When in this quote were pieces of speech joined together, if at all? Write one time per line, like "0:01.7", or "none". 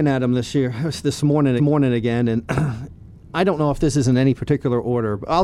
0:01.6